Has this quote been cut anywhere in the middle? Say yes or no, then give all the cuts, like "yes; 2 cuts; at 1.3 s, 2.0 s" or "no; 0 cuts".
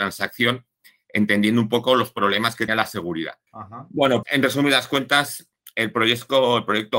yes; 3 cuts; at 2.7 s, 3.5 s, 4.2 s